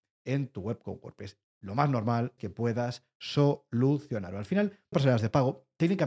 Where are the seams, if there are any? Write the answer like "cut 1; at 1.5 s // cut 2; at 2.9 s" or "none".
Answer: cut 1; at 1.4 s // cut 2; at 2.4 s // cut 3; at 4.9 s

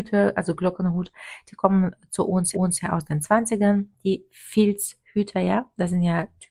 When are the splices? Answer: cut 1; at 2.5 s

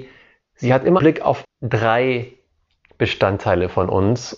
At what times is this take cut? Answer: cut 1; at 1.0 s // cut 2; at 1.4 s

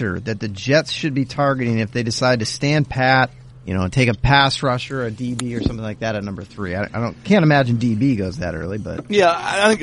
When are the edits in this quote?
cut 1; at 3.5 s

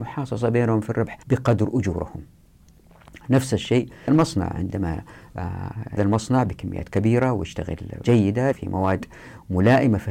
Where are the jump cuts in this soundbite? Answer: cut 1; at 1.2 s // cut 2; at 4.1 s // cut 3; at 6.0 s // cut 4; at 8.0 s // cut 5; at 8.5 s

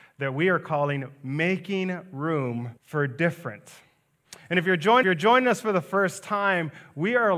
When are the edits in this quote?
cut 1; at 2.8 s // cut 2; at 5.0 s

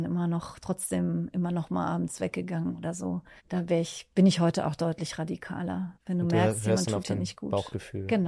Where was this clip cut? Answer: cut 1; at 3.4 s // cut 2; at 5.9 s

